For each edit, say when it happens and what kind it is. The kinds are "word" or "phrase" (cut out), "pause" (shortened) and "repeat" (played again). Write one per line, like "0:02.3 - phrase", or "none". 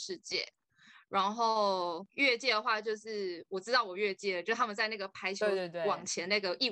0:02.1 - pause